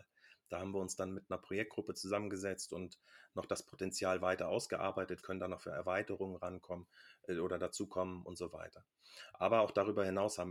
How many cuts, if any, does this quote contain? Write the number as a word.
one